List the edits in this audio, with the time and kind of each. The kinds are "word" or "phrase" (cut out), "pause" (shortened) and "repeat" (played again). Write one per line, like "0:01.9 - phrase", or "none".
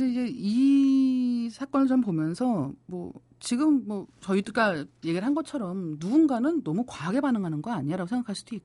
0:02.8 - pause